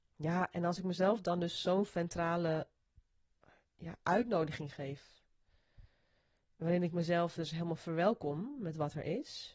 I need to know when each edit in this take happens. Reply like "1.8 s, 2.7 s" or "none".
none